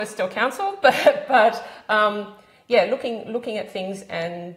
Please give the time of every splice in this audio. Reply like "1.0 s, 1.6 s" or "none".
none